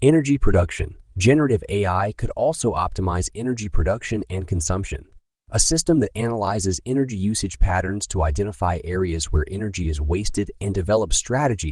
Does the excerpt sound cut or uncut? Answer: cut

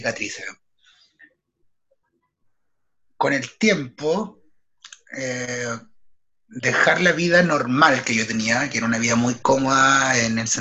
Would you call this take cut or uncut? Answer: uncut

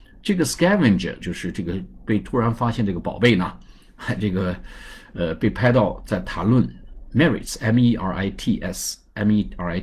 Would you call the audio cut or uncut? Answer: cut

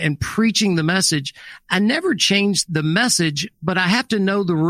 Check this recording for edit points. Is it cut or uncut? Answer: cut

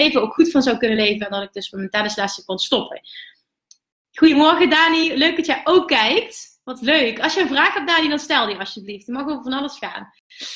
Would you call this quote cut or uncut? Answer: uncut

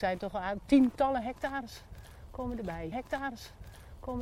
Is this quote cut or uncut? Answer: cut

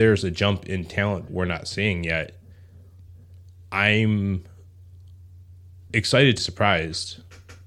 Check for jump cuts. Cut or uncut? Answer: cut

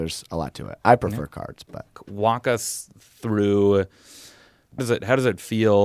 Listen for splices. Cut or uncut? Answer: cut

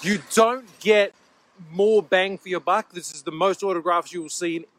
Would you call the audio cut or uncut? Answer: uncut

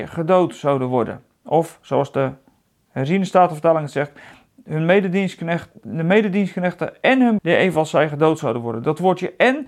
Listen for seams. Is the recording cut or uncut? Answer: cut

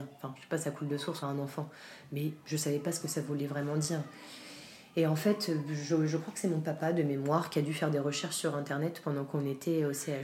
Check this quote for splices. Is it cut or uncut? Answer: cut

